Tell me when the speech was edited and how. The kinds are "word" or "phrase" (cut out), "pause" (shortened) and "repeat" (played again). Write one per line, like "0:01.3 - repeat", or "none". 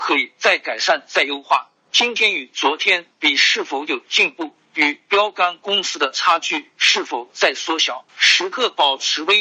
0:08.1 - pause